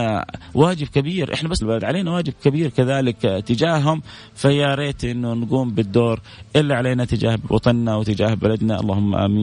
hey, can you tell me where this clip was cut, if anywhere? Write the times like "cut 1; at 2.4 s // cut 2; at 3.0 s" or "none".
cut 1; at 1.6 s